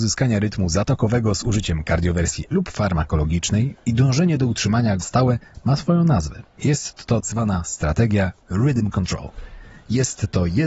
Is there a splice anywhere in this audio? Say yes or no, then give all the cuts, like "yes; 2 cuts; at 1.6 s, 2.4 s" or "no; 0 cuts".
yes; 3 cuts; at 2.5 s, 5.0 s, 7.2 s